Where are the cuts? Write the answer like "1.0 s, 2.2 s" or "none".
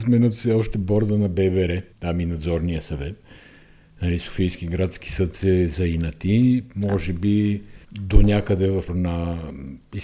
1.9 s, 7.8 s, 8.9 s